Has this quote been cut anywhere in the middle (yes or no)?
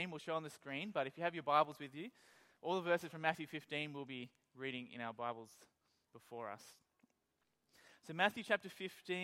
no